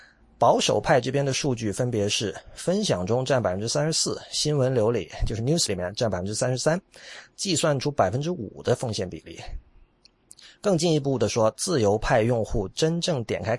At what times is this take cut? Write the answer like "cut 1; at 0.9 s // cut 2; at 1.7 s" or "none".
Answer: cut 1; at 5.6 s

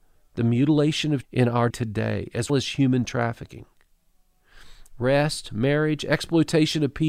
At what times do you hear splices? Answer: cut 1; at 1.2 s // cut 2; at 1.7 s // cut 3; at 2.5 s

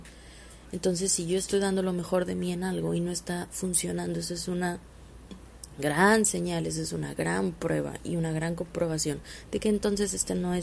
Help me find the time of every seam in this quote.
none

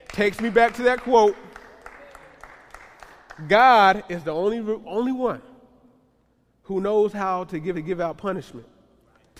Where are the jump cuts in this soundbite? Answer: cut 1; at 4.8 s // cut 2; at 7.7 s

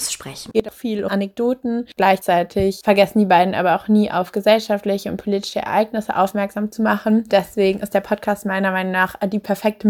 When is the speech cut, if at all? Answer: cut 1; at 1.1 s

